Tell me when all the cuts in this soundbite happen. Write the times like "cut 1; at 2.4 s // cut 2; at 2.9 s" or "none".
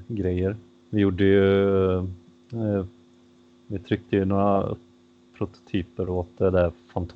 none